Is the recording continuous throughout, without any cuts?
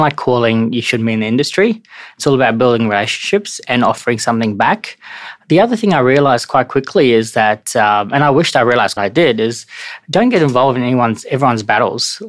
no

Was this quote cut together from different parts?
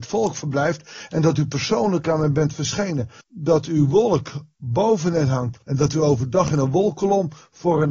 yes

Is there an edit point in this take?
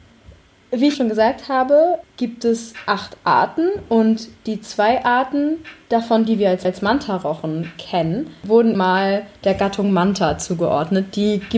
yes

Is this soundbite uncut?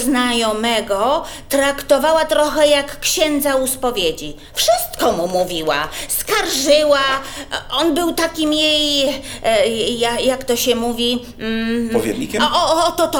yes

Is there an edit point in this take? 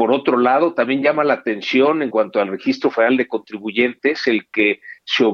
no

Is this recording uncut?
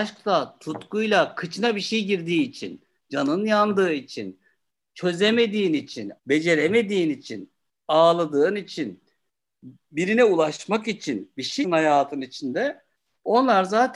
no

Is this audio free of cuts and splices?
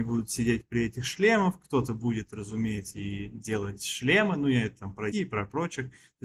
no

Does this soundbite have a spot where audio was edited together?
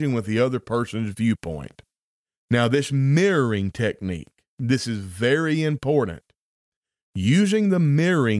no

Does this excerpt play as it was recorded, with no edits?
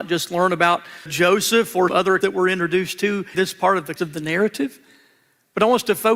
no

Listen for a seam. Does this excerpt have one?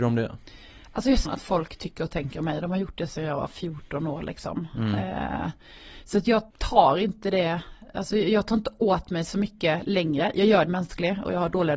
yes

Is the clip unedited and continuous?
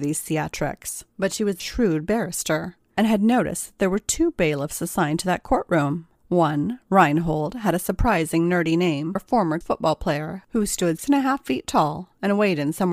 no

